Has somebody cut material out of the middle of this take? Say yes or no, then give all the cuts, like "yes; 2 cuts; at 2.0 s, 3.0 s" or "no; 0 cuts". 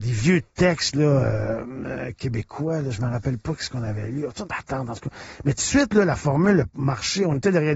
yes; 1 cut; at 4.4 s